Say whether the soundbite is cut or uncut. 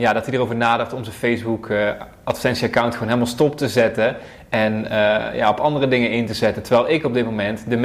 uncut